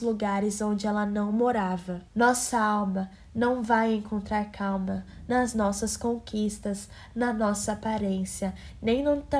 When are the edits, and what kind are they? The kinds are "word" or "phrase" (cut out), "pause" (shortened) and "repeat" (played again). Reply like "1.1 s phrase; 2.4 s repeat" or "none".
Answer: 2.1 s pause